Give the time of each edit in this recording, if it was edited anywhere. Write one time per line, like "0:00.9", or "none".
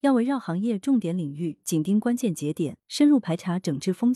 0:02.8